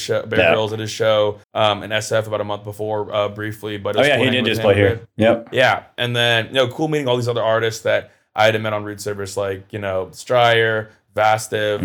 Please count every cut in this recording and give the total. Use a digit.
1